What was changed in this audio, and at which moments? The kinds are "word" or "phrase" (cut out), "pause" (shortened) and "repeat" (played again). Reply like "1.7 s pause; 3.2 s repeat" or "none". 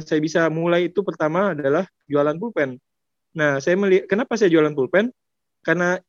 none